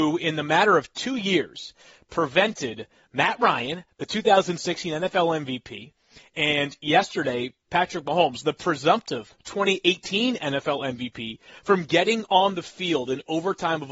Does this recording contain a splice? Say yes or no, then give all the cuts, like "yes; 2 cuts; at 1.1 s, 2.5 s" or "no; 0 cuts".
no; 0 cuts